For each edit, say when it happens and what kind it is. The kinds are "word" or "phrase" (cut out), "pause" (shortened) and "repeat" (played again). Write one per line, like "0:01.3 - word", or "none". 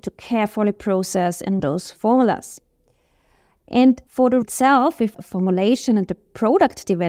0:01.6 - word
0:04.1 - pause
0:04.4 - word
0:05.1 - phrase